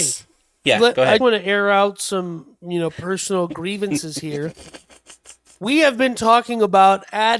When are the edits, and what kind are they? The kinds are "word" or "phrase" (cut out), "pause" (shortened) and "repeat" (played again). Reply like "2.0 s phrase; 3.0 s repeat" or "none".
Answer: 1.2 s word